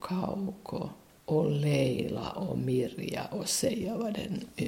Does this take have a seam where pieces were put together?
yes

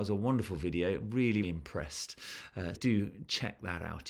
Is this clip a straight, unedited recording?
no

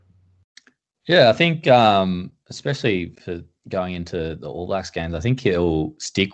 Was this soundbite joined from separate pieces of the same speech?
no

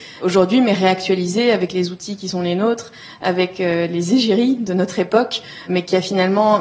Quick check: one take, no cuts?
yes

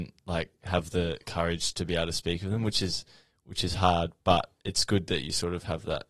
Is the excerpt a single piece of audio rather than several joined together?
yes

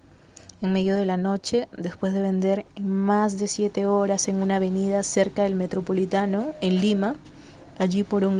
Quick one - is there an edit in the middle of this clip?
no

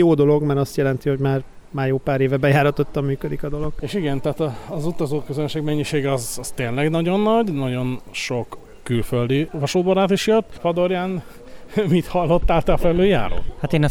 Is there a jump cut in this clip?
no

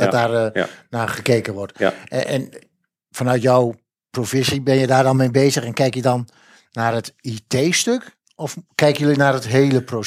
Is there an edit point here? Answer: no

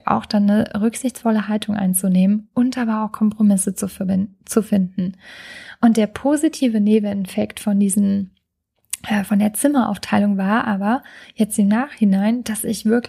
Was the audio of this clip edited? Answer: no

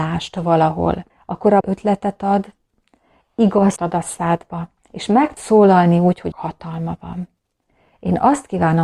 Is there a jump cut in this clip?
yes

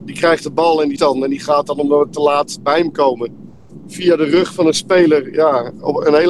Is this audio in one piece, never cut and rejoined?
no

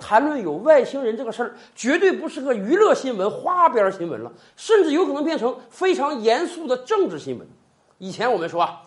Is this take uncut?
yes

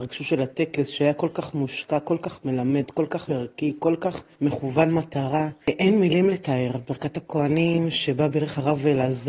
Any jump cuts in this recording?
yes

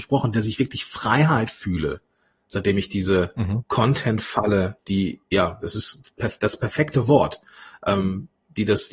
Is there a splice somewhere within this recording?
no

